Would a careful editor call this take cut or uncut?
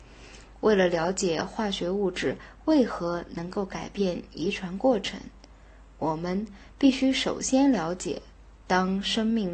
uncut